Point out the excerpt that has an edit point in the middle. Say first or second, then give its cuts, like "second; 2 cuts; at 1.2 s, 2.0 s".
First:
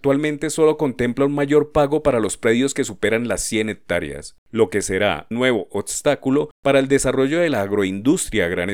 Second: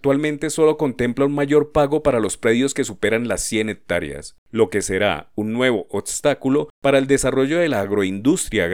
first; 1 cut; at 5.3 s